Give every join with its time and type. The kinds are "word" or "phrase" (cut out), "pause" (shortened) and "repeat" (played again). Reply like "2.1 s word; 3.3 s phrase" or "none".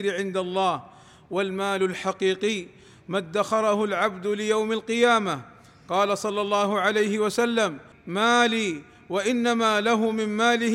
7.9 s phrase